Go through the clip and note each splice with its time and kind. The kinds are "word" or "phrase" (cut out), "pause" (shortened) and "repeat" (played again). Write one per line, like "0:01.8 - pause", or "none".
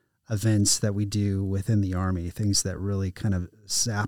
none